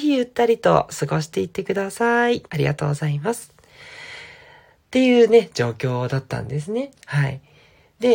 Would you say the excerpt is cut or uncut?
cut